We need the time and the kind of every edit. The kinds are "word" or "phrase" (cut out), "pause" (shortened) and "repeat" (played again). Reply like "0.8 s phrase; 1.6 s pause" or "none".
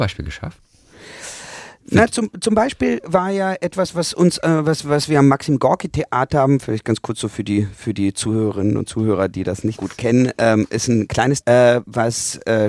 6.3 s word; 9.7 s word; 11.4 s phrase